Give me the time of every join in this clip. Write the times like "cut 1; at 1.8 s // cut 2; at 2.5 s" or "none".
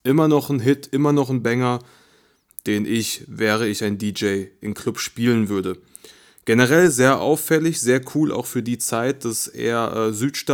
none